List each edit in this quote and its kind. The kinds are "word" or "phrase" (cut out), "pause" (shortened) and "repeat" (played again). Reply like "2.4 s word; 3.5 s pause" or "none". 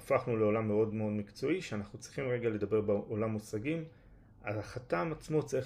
none